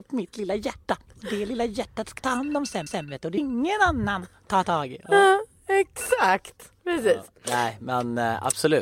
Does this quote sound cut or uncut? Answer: cut